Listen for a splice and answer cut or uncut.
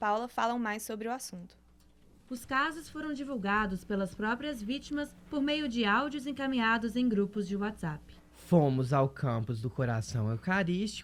uncut